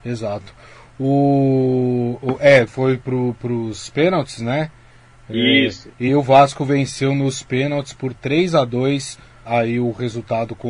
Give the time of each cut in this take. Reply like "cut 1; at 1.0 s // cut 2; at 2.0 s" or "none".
cut 1; at 2.7 s // cut 2; at 6.1 s // cut 3; at 9.4 s